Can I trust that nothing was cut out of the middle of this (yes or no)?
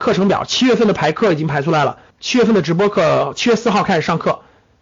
no